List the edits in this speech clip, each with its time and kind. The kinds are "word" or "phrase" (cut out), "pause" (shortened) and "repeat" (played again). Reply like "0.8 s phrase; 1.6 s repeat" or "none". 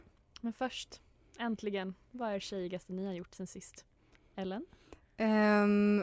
none